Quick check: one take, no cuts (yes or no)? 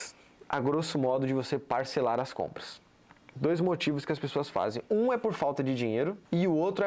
yes